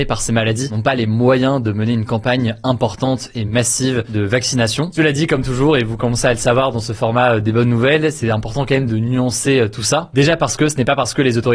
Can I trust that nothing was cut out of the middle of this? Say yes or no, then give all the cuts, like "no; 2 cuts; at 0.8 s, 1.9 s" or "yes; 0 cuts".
yes; 0 cuts